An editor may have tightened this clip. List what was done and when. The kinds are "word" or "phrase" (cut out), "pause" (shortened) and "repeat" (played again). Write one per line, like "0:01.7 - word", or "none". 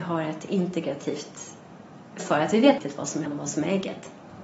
0:02.2 - word
0:02.8 - word
0:03.3 - word